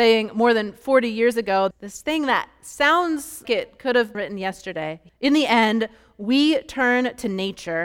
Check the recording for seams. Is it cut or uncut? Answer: cut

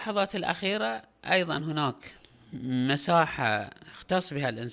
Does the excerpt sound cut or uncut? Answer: uncut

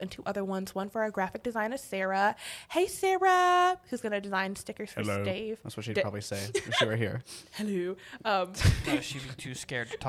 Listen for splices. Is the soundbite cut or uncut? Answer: uncut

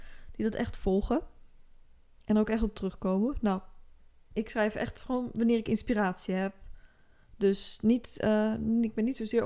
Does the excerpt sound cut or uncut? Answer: uncut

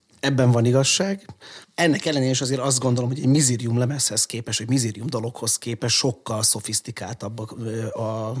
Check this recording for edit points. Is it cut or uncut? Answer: cut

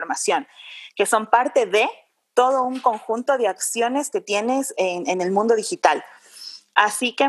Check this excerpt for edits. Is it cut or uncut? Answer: uncut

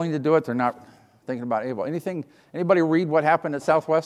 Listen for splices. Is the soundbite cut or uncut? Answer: uncut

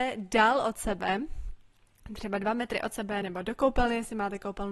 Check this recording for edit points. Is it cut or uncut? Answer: uncut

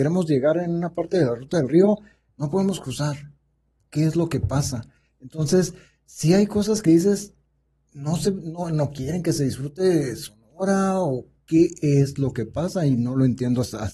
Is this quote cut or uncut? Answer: uncut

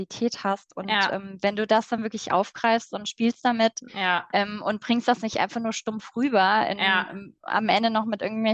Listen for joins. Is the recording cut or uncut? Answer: uncut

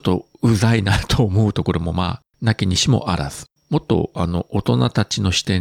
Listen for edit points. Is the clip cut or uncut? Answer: cut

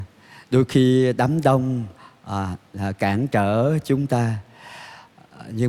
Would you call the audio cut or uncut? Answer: uncut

